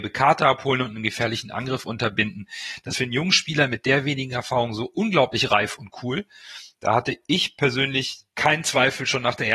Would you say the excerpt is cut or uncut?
cut